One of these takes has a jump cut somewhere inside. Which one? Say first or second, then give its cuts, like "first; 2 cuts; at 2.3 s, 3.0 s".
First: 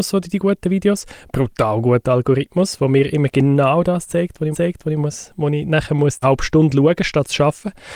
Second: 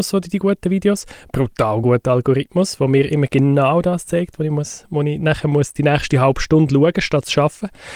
first; 2 cuts; at 4.5 s, 6.2 s